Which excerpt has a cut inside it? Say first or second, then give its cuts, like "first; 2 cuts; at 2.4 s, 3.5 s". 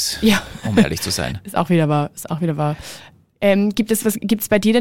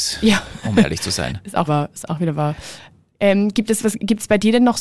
second; 1 cut; at 1.7 s